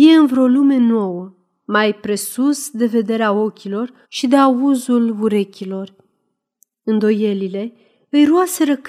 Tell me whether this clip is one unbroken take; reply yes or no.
no